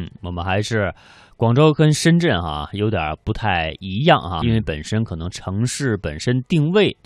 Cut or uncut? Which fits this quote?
cut